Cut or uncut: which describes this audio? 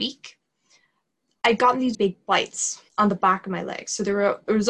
cut